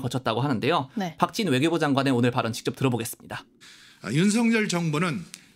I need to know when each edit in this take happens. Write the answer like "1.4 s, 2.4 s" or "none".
3.6 s

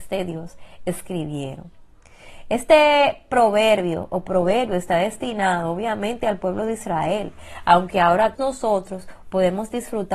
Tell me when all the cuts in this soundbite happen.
8.3 s

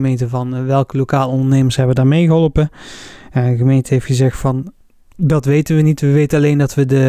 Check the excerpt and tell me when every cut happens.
none

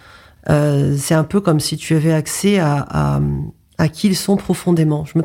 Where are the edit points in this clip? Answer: none

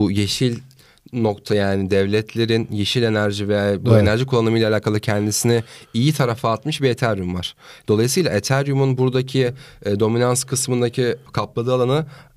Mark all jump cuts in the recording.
none

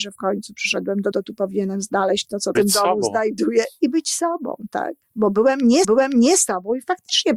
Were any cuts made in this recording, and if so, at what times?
1.1 s, 2.5 s, 5.0 s, 5.8 s

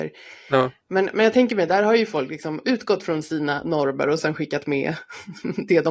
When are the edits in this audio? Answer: none

